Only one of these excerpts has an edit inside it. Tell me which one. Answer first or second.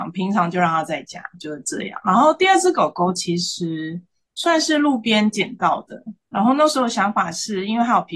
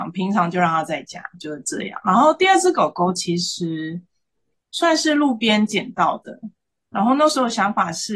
first